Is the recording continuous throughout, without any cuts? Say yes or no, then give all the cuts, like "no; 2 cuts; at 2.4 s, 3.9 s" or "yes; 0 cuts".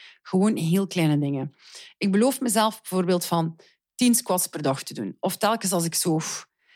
yes; 0 cuts